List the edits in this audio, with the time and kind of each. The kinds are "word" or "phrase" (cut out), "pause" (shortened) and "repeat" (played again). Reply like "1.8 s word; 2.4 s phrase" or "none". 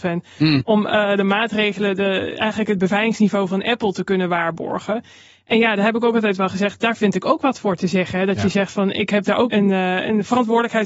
9.5 s word